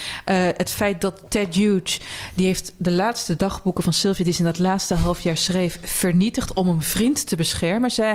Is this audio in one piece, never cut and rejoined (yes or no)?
yes